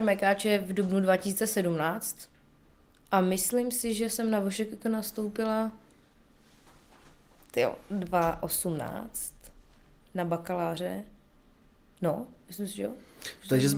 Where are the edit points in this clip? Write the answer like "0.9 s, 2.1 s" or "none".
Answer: none